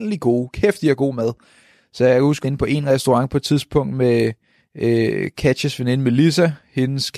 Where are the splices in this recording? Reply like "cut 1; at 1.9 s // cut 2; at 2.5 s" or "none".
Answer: cut 1; at 2.4 s